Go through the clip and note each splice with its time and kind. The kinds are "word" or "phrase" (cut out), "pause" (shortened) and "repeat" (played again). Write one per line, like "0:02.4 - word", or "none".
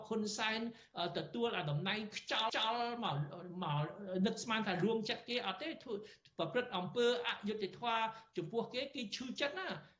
0:02.5 - repeat